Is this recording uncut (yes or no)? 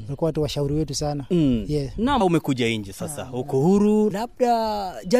no